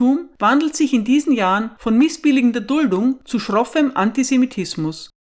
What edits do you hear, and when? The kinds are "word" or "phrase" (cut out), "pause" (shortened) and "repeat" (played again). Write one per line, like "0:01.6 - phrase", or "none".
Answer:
none